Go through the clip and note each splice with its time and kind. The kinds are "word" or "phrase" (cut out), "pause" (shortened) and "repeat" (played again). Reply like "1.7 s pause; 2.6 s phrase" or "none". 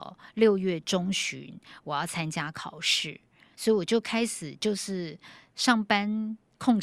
3.5 s word